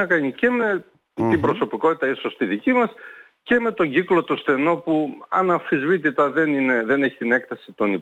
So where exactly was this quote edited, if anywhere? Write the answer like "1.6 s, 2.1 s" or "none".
none